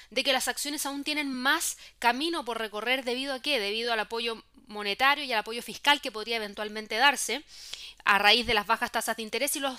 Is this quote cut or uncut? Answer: uncut